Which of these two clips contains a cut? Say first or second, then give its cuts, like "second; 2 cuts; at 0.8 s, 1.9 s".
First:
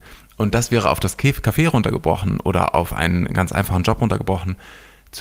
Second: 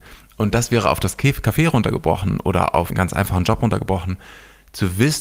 second; 1 cut; at 2.9 s